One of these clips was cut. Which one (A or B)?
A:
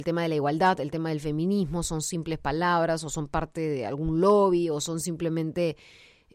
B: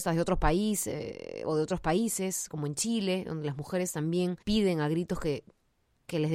B